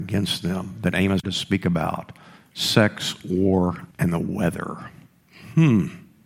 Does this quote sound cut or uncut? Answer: cut